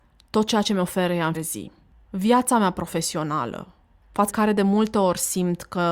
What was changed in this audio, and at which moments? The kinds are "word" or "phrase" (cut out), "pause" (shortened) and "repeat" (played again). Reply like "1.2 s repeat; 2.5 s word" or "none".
1.3 s word; 4.3 s word